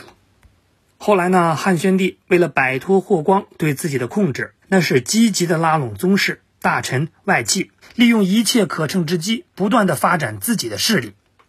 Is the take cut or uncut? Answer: cut